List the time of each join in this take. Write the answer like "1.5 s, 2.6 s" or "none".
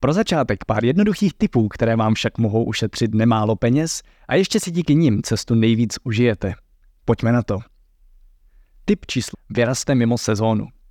9.3 s